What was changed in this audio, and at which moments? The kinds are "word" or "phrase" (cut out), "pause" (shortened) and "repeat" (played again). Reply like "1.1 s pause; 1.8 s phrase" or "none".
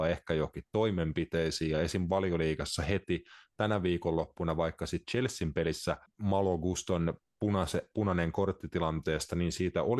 6.1 s pause